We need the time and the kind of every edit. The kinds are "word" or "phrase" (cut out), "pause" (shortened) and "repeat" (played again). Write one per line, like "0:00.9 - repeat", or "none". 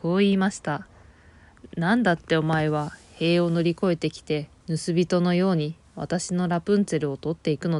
0:00.9 - pause
0:04.6 - pause

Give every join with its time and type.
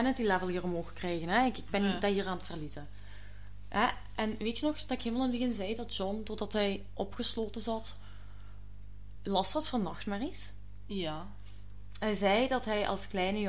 none

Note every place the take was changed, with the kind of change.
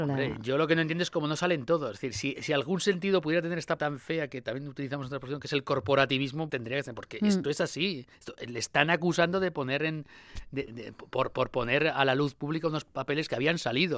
0:02.4 - word
0:03.8 - word
0:06.5 - word
0:08.1 - pause
0:10.7 - word

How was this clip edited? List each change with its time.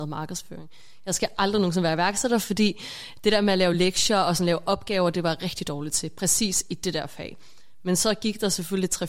none

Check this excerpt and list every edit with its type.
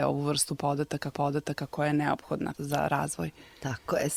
0:01.1 - repeat

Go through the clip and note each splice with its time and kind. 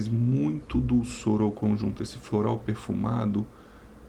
none

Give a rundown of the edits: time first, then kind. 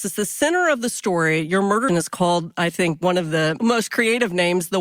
0:01.9 - word

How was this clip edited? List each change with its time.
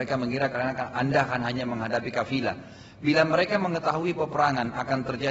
none

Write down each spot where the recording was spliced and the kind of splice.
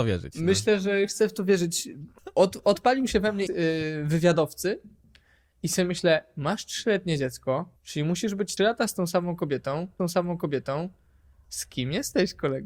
0:03.5 - word
0:07.8 - pause
0:08.6 - word
0:10.0 - repeat

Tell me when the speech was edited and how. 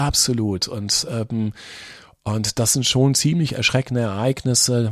none

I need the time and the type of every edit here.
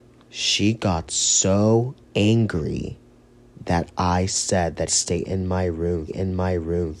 0:02.0 - pause
0:04.9 - phrase
0:06.1 - repeat

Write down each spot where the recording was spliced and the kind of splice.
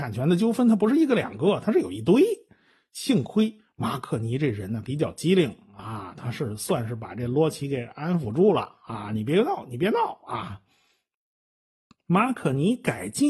none

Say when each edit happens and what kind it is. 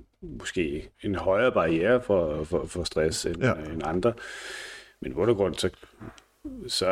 0:00.9 - pause

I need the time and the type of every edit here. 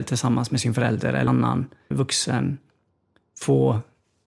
0:01.3 - word
0:01.9 - word

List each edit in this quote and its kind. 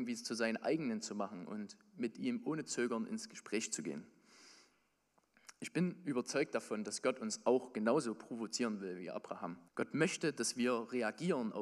0:09.7 - pause

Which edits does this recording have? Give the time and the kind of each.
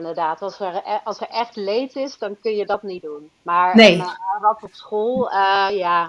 0:03.4 - pause

